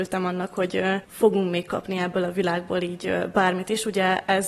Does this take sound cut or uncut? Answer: uncut